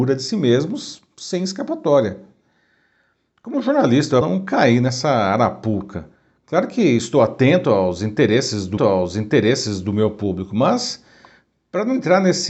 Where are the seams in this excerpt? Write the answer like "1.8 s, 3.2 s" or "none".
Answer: 4.2 s, 8.8 s